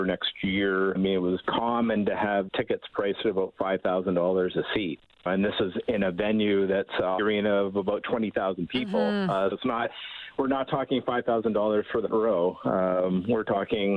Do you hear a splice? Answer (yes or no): yes